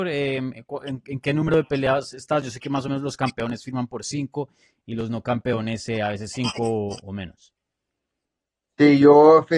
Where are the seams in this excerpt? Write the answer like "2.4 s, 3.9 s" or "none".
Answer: none